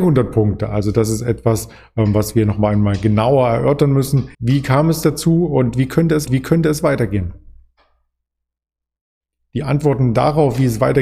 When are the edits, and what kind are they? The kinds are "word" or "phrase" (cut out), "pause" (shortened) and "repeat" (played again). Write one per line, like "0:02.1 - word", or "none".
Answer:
0:04.3 - pause
0:06.3 - repeat